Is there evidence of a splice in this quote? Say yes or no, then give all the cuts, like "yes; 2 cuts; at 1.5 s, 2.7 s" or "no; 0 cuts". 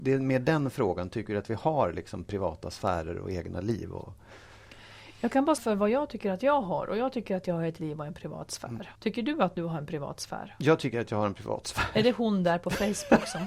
yes; 3 cuts; at 5.6 s, 7.8 s, 9.0 s